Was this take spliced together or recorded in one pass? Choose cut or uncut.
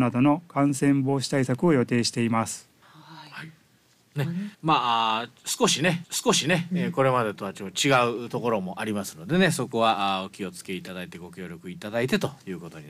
cut